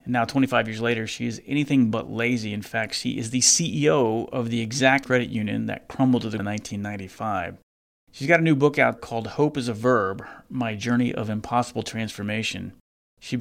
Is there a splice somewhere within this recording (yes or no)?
yes